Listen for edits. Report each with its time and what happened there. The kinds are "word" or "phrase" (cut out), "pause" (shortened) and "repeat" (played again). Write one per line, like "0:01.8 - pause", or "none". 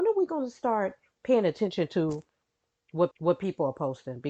0:03.1 - repeat